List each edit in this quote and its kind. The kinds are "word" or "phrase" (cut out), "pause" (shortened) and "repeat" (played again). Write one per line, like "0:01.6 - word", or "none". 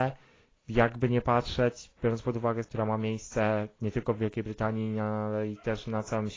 0:02.6 - word